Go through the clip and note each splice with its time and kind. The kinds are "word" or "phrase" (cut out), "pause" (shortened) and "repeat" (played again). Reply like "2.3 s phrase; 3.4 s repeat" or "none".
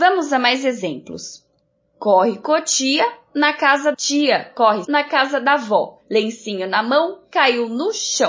1.6 s pause; 3.9 s word; 4.8 s word; 6.0 s pause

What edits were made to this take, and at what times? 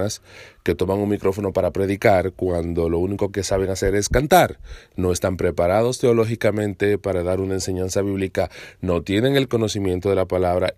none

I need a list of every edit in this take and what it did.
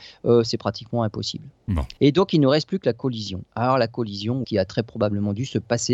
2.0 s pause; 4.4 s phrase

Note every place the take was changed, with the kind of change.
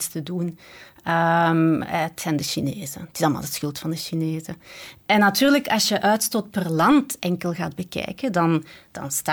none

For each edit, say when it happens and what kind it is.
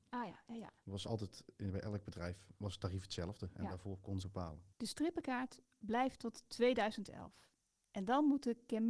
2.5 s word; 4.2 s phrase; 4.7 s pause

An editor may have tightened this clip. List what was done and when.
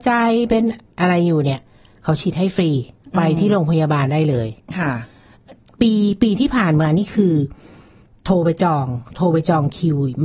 none

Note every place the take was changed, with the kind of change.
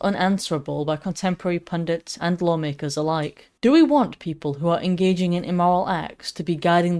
3.6 s pause

